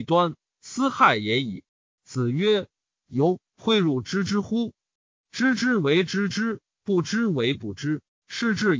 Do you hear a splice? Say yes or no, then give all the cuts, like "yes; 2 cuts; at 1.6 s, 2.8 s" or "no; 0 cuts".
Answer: yes; 2 cuts; at 1.7 s, 3.5 s